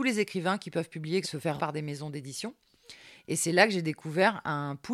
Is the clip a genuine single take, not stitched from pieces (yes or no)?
no